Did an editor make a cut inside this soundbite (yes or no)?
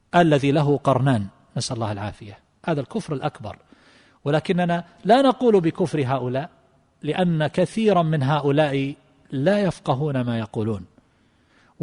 no